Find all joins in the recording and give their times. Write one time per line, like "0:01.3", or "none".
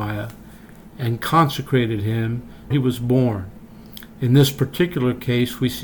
0:02.7